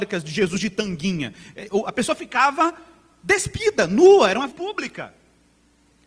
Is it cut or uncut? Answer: cut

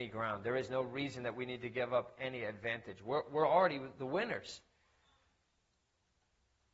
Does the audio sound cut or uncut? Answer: uncut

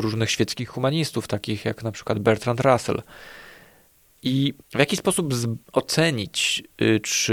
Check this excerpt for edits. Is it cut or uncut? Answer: cut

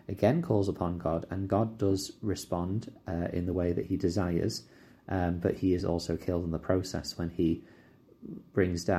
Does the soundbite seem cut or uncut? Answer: uncut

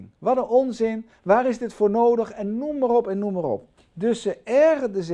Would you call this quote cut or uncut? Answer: cut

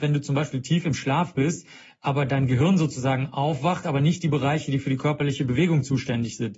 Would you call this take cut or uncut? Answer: uncut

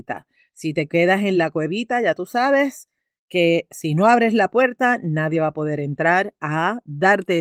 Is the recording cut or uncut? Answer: uncut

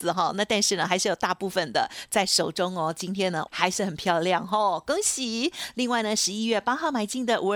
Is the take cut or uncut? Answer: cut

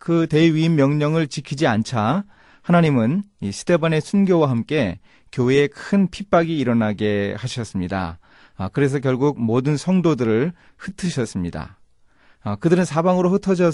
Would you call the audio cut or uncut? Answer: uncut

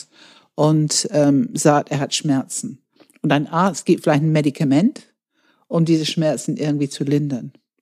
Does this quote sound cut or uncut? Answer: uncut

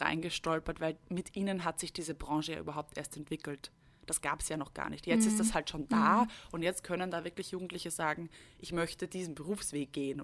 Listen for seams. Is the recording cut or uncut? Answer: uncut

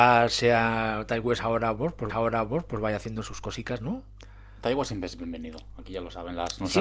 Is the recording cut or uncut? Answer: cut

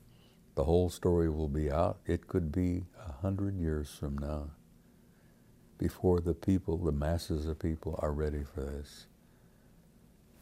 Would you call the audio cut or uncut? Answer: uncut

